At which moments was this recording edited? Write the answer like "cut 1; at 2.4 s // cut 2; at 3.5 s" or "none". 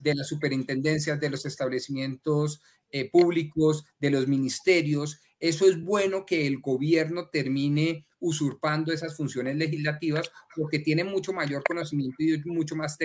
none

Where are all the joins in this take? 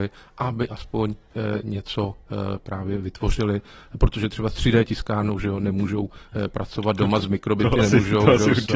none

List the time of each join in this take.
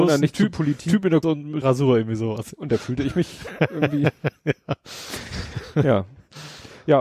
cut 1; at 1.2 s // cut 2; at 1.6 s

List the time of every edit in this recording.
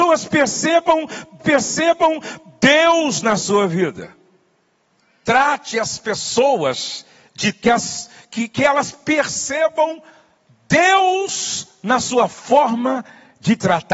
cut 1; at 1.4 s // cut 2; at 7.6 s

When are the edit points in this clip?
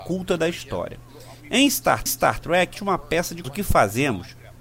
cut 1; at 2.1 s // cut 2; at 2.7 s // cut 3; at 3.4 s

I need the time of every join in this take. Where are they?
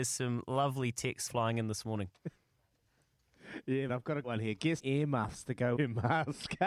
cut 1; at 1.3 s // cut 2; at 3.9 s // cut 3; at 4.2 s // cut 4; at 4.8 s // cut 5; at 5.8 s

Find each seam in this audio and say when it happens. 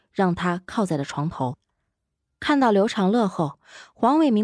none

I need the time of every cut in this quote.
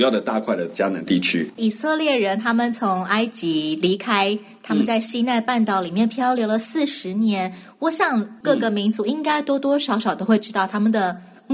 none

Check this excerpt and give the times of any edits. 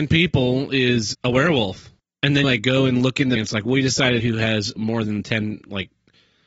cut 1; at 1.1 s // cut 2; at 2.4 s // cut 3; at 3.4 s // cut 4; at 4.2 s // cut 5; at 4.8 s

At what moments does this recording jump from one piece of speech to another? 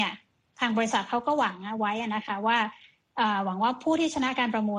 none

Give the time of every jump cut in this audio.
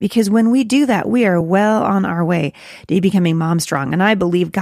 none

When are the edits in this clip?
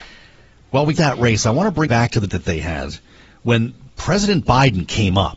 cut 1; at 0.9 s // cut 2; at 1.9 s // cut 3; at 2.3 s

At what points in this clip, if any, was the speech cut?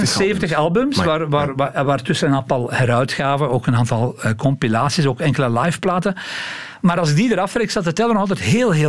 none

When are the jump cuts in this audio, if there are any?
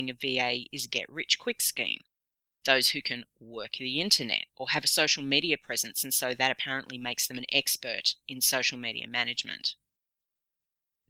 none

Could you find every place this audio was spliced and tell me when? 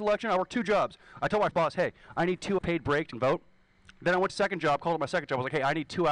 cut 1; at 1.5 s // cut 2; at 2.6 s // cut 3; at 3.1 s // cut 4; at 4.3 s

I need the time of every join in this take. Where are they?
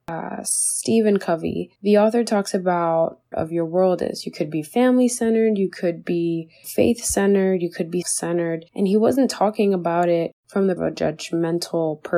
cut 1; at 1.8 s // cut 2; at 3.3 s // cut 3; at 6.6 s // cut 4; at 8.0 s // cut 5; at 8.7 s // cut 6; at 10.4 s // cut 7; at 10.8 s

